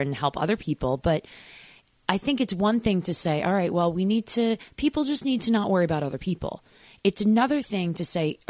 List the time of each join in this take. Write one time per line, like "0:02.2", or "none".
none